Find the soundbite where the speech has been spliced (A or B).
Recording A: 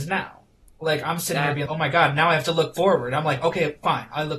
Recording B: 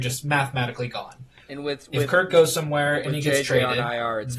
A